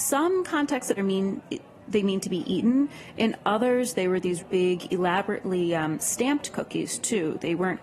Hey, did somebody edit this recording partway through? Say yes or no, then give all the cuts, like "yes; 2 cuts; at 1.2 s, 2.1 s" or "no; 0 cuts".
yes; 2 cuts; at 1.0 s, 4.4 s